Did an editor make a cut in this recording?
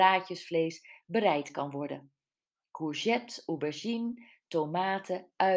no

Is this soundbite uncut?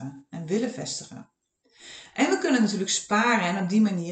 yes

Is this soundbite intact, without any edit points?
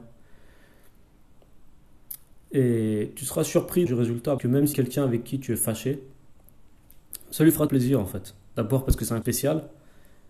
no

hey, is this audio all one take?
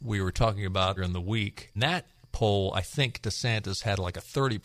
no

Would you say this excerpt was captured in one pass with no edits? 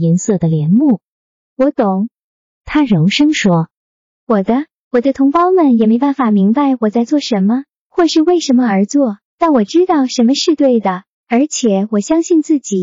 no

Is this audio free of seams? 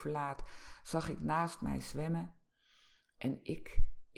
yes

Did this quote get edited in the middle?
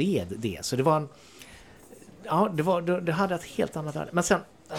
no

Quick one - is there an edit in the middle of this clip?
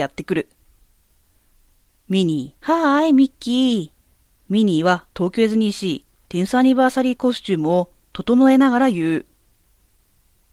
yes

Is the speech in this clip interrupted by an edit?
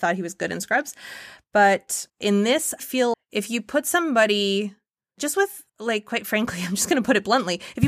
yes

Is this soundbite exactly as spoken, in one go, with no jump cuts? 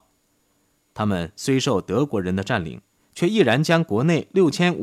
yes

